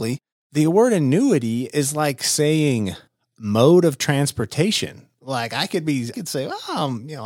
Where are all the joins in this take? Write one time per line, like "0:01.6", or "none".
0:06.1